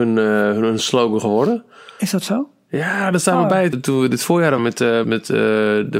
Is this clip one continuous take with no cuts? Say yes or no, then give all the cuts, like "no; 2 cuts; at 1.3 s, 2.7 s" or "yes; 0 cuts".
no; 3 cuts; at 3.7 s, 4.6 s, 5.0 s